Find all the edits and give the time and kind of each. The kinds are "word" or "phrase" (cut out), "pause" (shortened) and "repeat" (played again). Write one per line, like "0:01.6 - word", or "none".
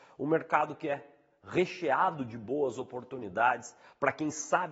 none

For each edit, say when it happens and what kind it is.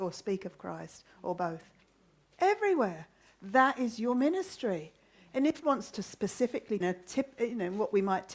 0:05.6 - word
0:06.8 - phrase

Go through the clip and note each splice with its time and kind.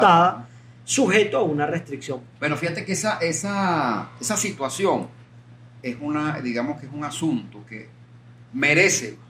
0:05.3 - pause

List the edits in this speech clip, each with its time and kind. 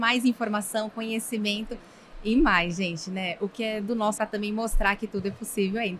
0:04.2 - phrase

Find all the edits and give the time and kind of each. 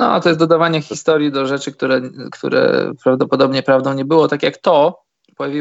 none

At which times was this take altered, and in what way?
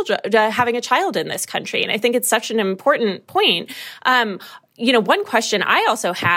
none

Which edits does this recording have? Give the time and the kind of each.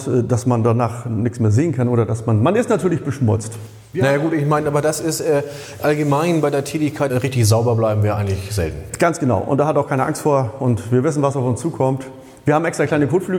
0:07.1 - phrase

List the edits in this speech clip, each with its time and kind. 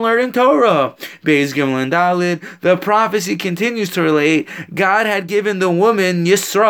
none

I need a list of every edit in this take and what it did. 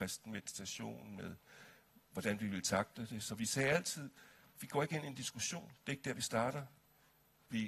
none

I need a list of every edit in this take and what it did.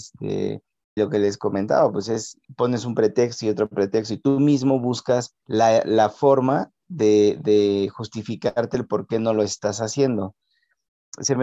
0:01.0 - word
0:02.4 - pause
0:05.4 - pause

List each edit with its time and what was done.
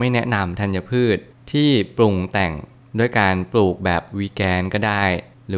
none

